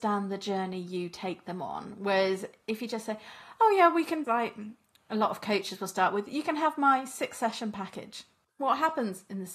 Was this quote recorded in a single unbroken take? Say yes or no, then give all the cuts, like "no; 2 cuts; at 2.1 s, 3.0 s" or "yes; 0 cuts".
no; 1 cut; at 4.2 s